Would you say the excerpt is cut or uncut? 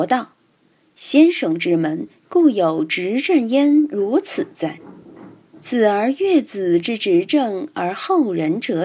uncut